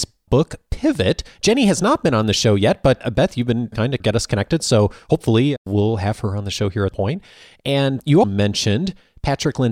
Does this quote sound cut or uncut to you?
cut